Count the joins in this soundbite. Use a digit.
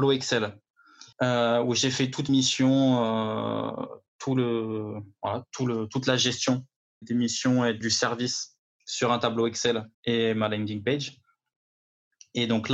6